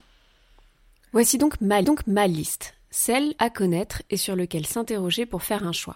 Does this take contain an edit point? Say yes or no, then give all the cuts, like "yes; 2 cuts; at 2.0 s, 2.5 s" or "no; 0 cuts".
yes; 2 cuts; at 1.8 s, 3.4 s